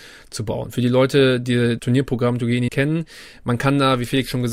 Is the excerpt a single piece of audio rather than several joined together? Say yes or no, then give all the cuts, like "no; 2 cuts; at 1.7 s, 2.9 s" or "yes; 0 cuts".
no; 2 cuts; at 1.8 s, 2.7 s